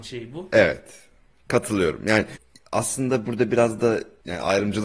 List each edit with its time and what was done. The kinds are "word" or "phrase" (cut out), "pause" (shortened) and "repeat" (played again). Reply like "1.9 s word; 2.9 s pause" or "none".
none